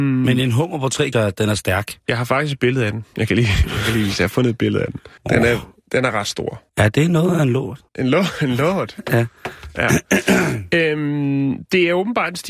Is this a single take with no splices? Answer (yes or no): no